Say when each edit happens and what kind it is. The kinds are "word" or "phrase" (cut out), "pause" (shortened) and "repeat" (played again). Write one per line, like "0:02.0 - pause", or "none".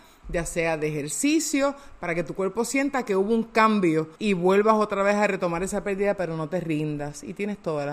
0:04.2 - pause